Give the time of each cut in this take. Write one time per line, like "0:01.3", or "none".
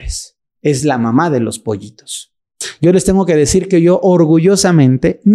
none